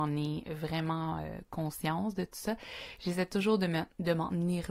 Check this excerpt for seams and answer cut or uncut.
uncut